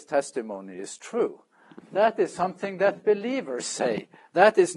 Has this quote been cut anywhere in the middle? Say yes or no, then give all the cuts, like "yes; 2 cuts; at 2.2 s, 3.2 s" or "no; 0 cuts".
no; 0 cuts